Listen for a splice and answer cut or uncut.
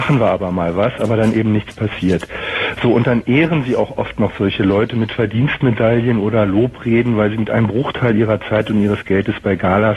uncut